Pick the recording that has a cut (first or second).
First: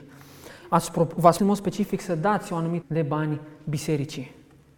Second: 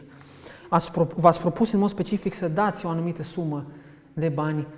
first